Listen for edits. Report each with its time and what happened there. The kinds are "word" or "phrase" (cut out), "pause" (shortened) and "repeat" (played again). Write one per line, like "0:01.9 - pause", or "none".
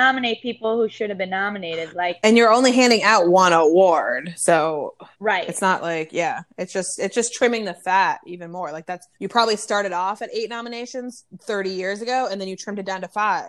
0:05.1 - pause
0:09.1 - pause